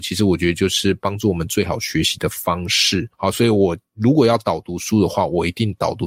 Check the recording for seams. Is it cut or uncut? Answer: cut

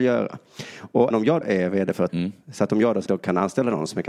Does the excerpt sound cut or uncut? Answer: cut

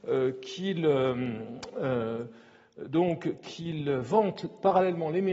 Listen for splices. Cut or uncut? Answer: uncut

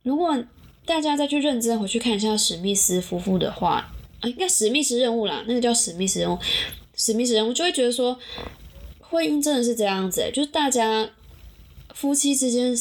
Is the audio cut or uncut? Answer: uncut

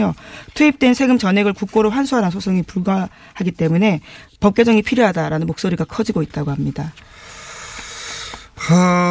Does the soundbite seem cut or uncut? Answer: uncut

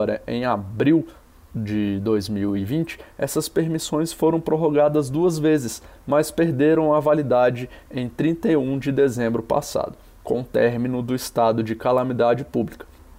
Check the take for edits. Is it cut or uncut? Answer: uncut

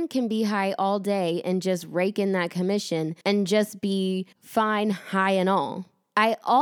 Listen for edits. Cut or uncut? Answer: cut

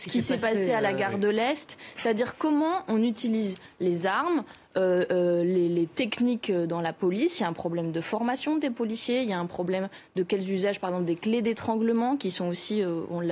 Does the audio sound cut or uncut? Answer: uncut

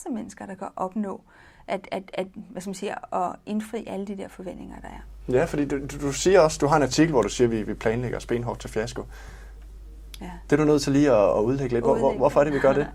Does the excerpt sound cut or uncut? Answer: uncut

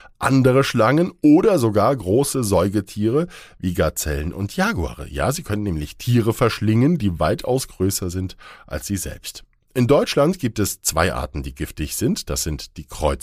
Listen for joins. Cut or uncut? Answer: uncut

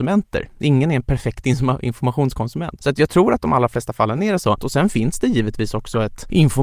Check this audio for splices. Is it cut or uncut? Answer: uncut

